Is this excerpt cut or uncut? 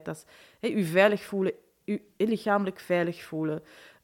uncut